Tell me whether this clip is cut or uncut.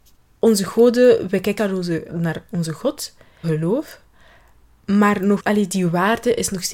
cut